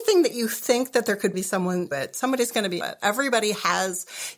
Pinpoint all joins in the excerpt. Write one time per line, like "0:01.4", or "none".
0:01.3
0:01.9
0:02.8